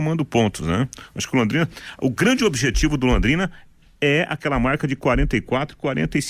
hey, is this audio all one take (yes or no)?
yes